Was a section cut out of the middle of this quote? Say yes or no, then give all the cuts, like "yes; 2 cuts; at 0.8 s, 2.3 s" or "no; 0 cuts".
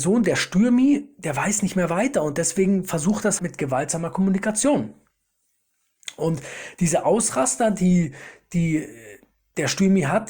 yes; 1 cut; at 3.4 s